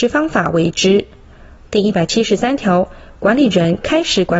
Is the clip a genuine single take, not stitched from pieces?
yes; 0 cuts

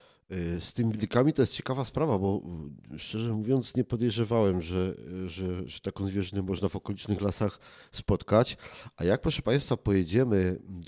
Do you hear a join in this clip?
no; 0 cuts

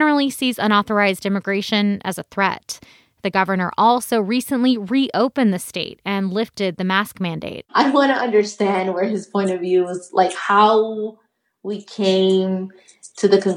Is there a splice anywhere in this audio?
no; 0 cuts

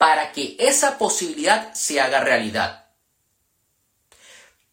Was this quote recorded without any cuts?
yes; 0 cuts

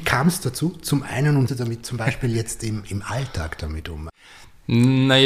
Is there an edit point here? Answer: yes; 1 cut; at 1.5 s

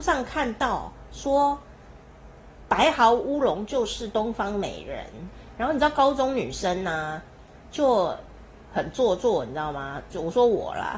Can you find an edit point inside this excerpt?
no; 0 cuts

